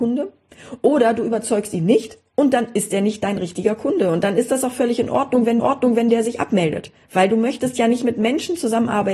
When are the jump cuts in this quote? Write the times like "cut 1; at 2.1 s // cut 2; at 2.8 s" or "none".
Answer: cut 1; at 5.6 s